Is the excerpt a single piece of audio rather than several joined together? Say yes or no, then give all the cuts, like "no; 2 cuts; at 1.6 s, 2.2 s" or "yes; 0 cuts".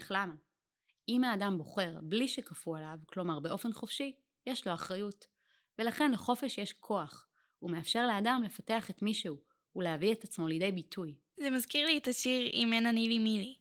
yes; 0 cuts